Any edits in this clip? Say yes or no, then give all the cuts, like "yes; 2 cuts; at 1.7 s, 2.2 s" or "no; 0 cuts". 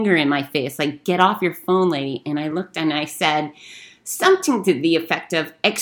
no; 0 cuts